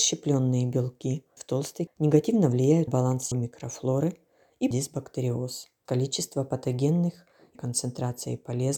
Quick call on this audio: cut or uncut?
cut